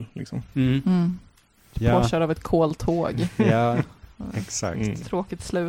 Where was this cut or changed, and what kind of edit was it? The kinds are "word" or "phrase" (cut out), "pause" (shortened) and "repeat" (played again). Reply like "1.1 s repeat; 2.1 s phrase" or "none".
none